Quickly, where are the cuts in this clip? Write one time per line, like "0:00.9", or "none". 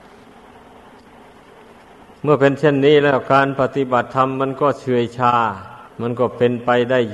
0:05.9

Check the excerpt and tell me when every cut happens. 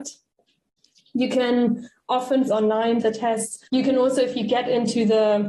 0:02.5
0:03.0
0:03.7

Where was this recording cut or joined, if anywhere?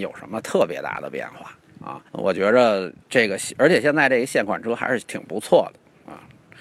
0:02.1
0:03.0

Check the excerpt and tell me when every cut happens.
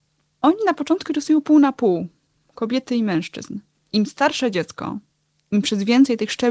none

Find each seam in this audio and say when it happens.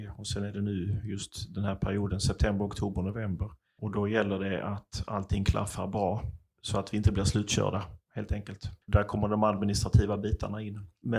0:08.8

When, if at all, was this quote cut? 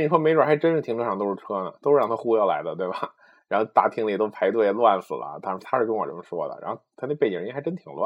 none

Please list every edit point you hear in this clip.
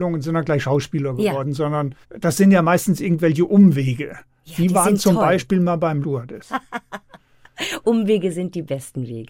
0:02.0
0:06.0

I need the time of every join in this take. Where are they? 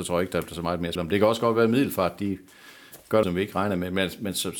0:01.0
0:03.2

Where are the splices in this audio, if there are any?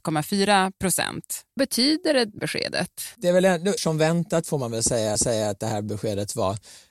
0:01.6
0:02.4
0:03.8
0:05.2

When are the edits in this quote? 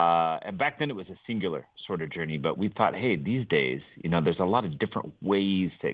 none

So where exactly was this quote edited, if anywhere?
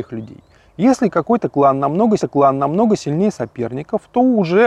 0:02.2

